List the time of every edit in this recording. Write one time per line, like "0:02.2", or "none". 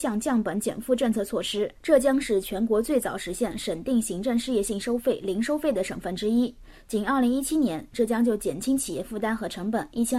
0:01.8